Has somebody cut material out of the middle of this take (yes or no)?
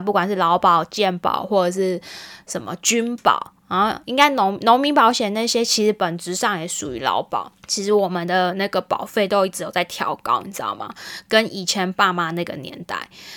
yes